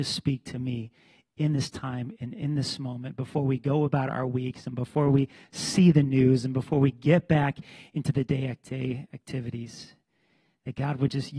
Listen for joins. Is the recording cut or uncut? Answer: uncut